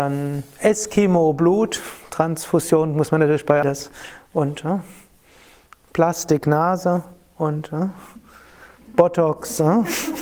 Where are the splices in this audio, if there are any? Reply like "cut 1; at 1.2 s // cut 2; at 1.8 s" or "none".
cut 1; at 3.6 s